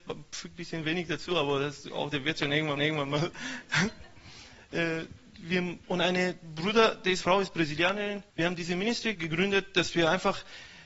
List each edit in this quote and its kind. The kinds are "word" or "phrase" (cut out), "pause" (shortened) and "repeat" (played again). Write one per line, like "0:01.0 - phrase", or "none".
0:02.8 - repeat
0:05.8 - pause
0:07.2 - phrase
0:08.3 - pause
0:09.1 - word